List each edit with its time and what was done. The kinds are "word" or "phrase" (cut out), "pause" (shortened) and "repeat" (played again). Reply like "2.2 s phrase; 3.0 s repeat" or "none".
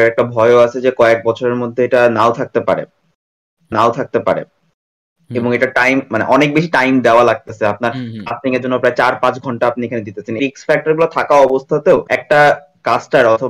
3.7 s repeat; 10.4 s word; 12.1 s pause